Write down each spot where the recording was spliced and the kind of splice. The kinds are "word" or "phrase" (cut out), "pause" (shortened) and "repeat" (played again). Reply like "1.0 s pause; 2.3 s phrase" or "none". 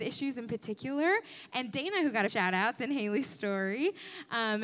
1.6 s word; 2.3 s phrase